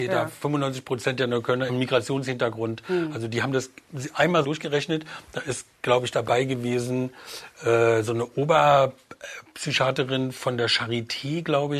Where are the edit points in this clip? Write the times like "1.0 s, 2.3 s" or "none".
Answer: 1.7 s, 4.4 s